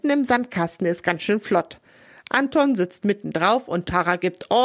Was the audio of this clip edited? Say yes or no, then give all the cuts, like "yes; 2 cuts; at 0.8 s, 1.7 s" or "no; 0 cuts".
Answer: no; 0 cuts